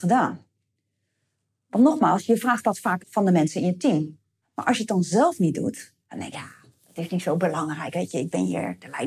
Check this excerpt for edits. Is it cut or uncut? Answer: cut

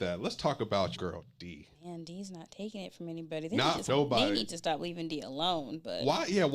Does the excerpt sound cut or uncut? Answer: cut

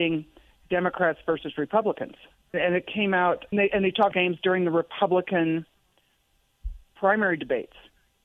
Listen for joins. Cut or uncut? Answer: cut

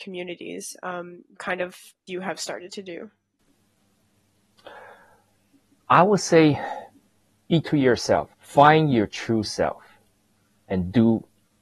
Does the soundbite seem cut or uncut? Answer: cut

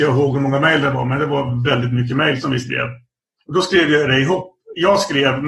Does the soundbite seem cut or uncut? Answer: cut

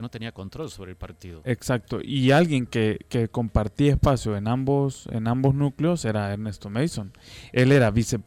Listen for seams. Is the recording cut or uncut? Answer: uncut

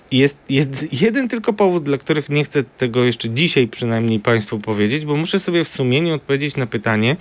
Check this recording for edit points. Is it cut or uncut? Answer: uncut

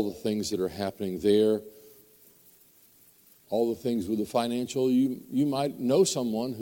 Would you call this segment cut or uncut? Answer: uncut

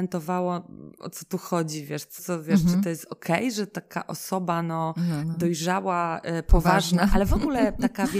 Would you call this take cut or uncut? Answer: cut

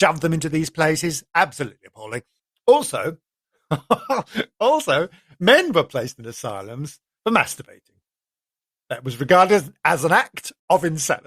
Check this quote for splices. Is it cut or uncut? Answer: uncut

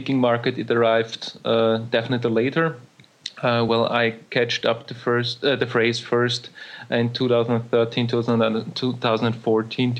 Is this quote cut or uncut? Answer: uncut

